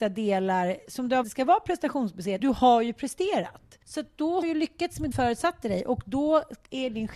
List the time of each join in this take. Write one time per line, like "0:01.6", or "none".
0:01.2
0:02.4
0:03.8
0:04.4
0:05.1